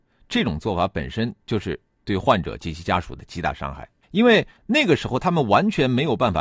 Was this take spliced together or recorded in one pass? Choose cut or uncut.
cut